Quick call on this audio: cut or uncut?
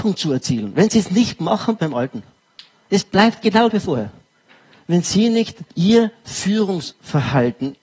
cut